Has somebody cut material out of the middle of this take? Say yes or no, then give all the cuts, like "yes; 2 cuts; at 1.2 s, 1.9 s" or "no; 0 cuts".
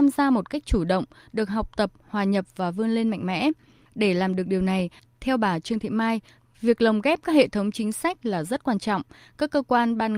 no; 0 cuts